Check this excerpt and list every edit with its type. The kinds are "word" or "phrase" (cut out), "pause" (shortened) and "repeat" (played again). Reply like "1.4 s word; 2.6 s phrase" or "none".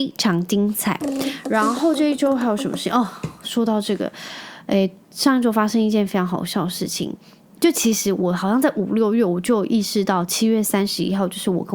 none